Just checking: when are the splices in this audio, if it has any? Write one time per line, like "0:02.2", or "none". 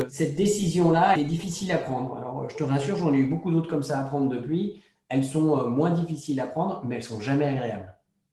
0:01.2